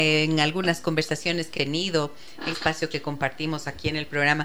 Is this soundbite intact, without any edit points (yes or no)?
no